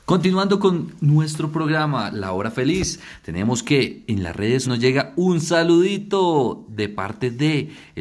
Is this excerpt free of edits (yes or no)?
no